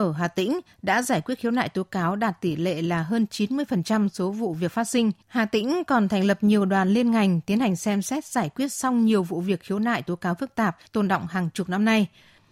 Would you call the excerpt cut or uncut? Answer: cut